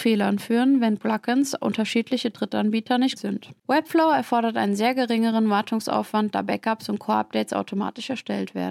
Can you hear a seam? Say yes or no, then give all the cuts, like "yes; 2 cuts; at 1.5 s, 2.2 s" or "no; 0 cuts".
yes; 1 cut; at 3.2 s